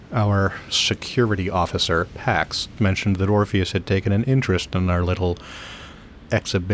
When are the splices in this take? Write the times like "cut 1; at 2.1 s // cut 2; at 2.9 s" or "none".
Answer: none